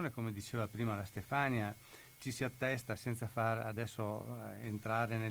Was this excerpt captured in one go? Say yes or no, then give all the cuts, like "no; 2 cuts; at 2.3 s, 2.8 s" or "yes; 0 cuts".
yes; 0 cuts